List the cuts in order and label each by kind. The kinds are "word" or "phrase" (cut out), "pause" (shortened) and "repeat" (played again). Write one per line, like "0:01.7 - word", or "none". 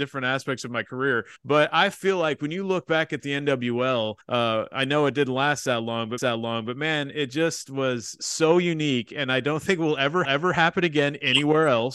0:01.4 - pause
0:04.2 - pause
0:06.2 - repeat
0:10.2 - repeat